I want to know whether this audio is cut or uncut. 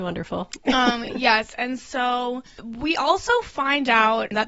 uncut